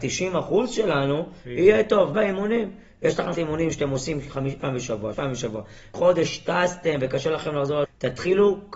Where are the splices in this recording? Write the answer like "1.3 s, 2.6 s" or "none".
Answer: 2.1 s, 3.3 s, 4.6 s, 5.1 s, 5.9 s, 7.8 s